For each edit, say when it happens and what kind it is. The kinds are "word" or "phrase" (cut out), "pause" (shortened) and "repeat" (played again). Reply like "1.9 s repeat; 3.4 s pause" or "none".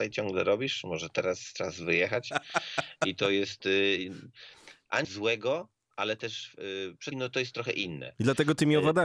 5.0 s word; 7.1 s word